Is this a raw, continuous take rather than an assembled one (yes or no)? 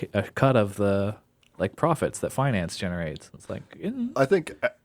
yes